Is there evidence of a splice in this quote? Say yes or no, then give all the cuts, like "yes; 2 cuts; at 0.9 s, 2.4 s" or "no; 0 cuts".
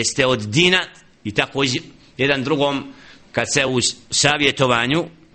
no; 0 cuts